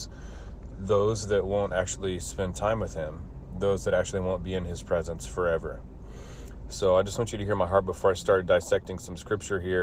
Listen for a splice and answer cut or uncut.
uncut